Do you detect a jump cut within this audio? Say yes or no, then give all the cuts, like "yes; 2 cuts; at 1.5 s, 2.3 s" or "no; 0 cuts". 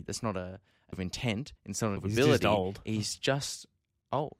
yes; 3 cuts; at 0.9 s, 1.6 s, 2.0 s